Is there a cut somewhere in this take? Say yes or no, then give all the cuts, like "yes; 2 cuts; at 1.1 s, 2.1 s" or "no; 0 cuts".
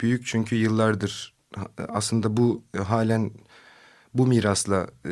no; 0 cuts